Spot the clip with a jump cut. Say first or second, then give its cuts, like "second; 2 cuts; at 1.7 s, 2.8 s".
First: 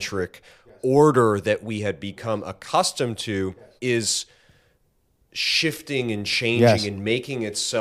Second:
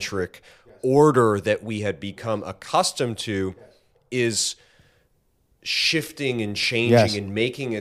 first; 1 cut; at 3.8 s